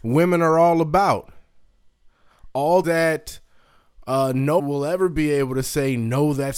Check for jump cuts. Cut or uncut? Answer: cut